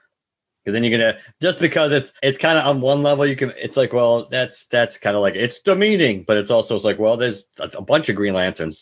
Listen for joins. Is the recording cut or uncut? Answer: cut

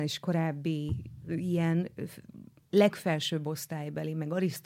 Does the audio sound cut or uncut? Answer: cut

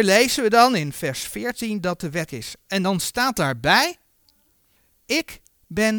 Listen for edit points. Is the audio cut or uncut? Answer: cut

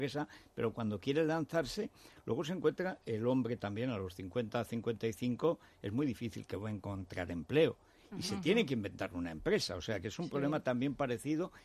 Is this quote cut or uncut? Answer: uncut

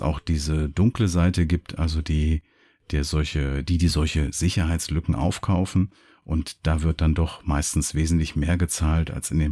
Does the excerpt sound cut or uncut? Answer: uncut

